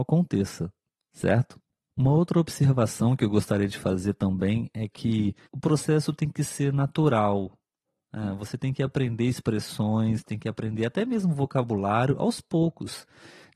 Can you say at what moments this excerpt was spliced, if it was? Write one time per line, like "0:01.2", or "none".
0:05.4